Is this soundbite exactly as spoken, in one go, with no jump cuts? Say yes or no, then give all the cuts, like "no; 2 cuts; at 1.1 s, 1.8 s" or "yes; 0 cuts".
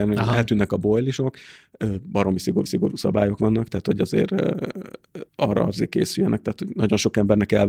no; 2 cuts; at 2.7 s, 5.3 s